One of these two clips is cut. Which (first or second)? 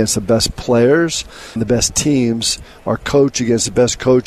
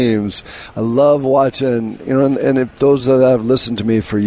first